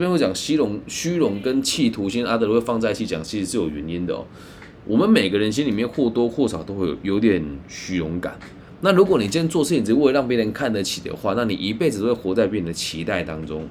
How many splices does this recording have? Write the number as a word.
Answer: zero